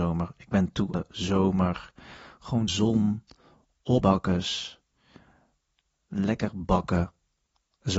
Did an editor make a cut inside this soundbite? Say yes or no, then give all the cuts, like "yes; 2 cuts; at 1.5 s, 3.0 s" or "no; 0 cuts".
yes; 3 cuts; at 0.9 s, 2.7 s, 4.0 s